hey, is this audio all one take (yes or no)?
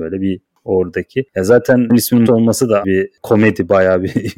no